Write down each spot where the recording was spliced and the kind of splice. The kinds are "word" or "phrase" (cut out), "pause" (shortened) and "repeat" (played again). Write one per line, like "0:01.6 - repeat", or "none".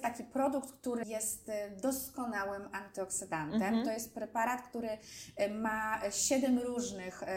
none